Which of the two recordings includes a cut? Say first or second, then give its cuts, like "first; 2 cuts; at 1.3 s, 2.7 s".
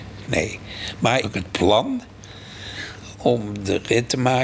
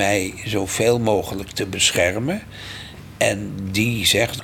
first; 2 cuts; at 1.2 s, 3.1 s